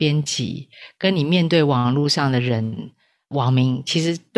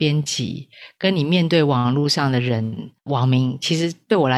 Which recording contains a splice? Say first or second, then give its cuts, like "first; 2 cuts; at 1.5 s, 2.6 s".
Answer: second; 1 cut; at 3.0 s